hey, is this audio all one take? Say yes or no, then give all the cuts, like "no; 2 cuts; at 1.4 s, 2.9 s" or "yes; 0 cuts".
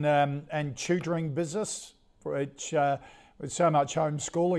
yes; 0 cuts